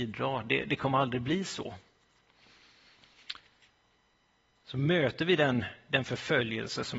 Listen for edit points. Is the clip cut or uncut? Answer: uncut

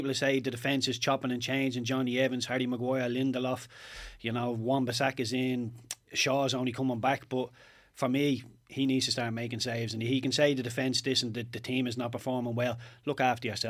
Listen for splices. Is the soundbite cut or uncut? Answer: uncut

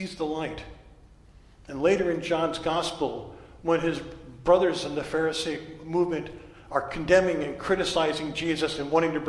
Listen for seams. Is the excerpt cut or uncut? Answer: uncut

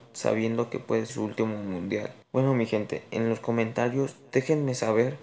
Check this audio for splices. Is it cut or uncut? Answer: cut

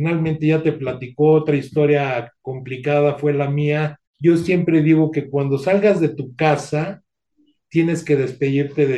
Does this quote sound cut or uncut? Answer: cut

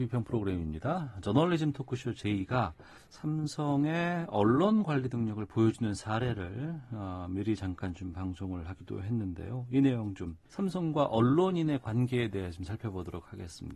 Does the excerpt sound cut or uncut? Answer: cut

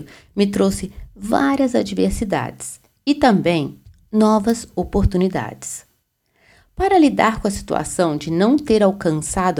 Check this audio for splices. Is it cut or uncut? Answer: uncut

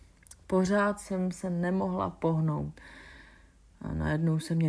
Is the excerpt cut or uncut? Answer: uncut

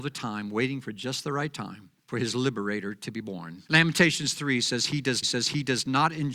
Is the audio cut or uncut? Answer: cut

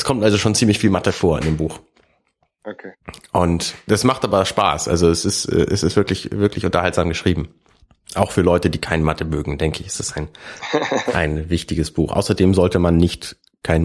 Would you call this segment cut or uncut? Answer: uncut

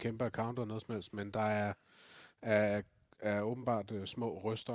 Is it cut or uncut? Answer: uncut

